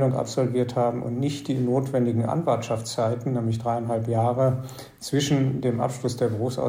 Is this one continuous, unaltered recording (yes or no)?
yes